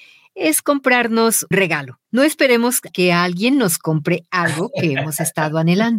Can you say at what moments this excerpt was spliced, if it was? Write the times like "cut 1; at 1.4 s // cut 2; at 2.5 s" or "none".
cut 1; at 1.5 s // cut 2; at 2.0 s // cut 3; at 2.9 s